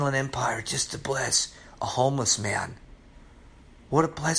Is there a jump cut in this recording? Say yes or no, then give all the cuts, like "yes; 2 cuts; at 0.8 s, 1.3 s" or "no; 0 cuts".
no; 0 cuts